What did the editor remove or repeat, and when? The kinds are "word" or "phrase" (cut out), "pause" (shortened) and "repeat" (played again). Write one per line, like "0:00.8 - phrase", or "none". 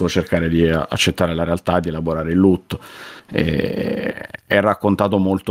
none